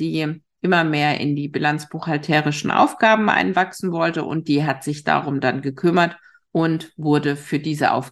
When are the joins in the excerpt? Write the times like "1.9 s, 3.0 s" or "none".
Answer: none